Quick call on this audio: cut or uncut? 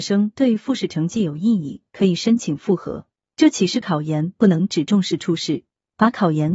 uncut